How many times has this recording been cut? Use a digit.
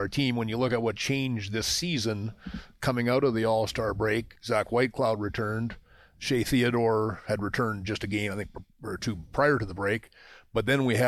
0